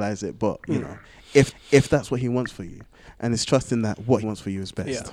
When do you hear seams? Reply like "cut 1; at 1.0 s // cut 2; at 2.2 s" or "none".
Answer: cut 1; at 1.5 s // cut 2; at 4.2 s

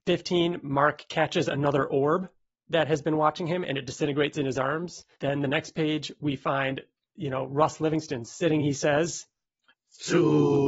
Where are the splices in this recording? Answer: cut 1; at 5.1 s // cut 2; at 8.6 s

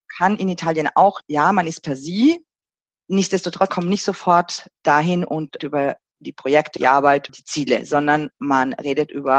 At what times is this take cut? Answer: cut 1; at 1.2 s // cut 2; at 3.7 s // cut 3; at 4.7 s // cut 4; at 5.6 s // cut 5; at 6.8 s // cut 6; at 7.3 s

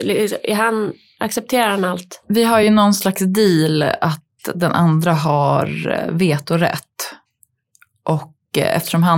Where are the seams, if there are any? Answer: none

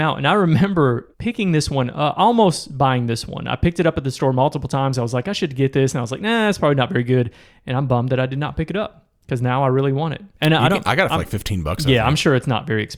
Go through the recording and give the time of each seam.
cut 1; at 1.1 s

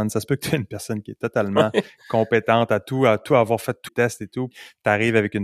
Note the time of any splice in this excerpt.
cut 1; at 3.9 s // cut 2; at 4.5 s

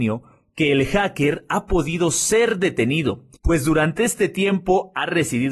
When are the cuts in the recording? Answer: cut 1; at 3.4 s

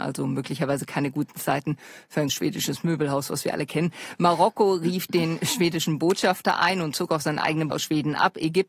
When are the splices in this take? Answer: cut 1; at 2.3 s // cut 2; at 7.7 s

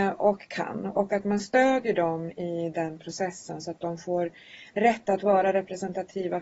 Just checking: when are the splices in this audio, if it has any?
none

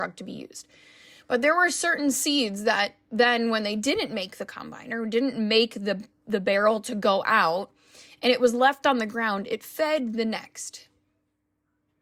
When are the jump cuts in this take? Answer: none

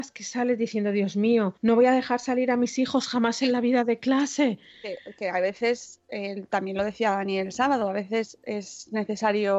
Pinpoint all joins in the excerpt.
cut 1; at 1.6 s

